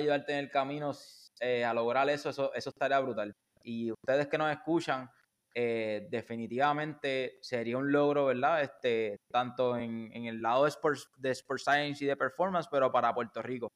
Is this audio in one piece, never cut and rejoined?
yes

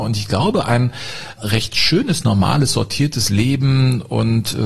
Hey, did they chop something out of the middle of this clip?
no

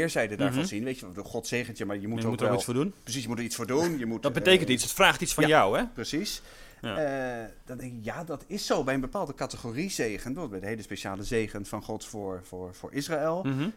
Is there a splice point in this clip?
no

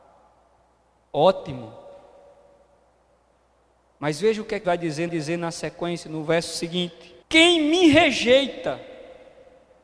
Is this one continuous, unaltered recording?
no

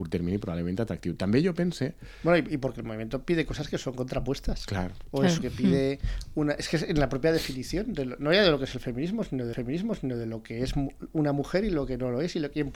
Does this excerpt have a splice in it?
yes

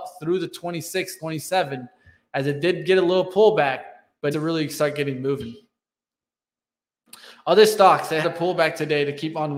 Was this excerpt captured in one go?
no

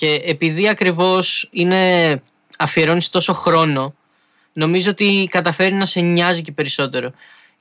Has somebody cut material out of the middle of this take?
no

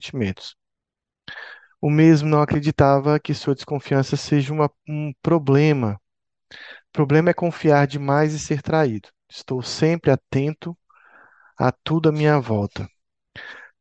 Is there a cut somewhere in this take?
no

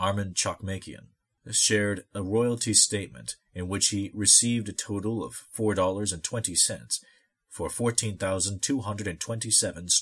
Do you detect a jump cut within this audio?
no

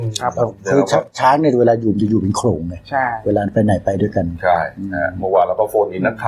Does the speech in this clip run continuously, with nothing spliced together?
yes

